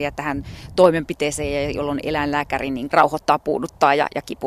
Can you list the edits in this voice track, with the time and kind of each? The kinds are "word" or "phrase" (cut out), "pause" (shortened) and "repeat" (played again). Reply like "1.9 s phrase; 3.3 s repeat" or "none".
2.9 s word